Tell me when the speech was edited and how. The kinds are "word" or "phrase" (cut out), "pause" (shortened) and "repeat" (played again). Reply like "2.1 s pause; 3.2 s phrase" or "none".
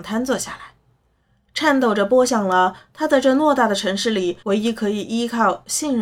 4.4 s pause